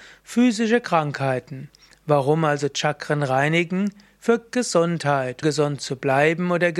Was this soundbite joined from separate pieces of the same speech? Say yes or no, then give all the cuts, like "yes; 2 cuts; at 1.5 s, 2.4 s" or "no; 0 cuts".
yes; 1 cut; at 5.4 s